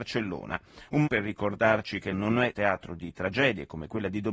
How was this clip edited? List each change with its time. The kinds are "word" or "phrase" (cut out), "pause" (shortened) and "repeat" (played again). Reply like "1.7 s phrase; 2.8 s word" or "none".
1.1 s word; 2.1 s word; 2.5 s word